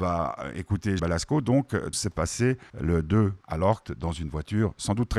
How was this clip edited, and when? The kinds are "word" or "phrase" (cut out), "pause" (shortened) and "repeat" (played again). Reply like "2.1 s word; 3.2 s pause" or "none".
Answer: 1.0 s word; 1.9 s word; 2.7 s pause; 3.4 s word; 3.8 s phrase